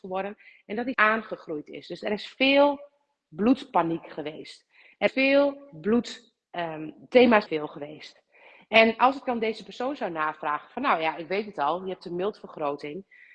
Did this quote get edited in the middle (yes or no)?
yes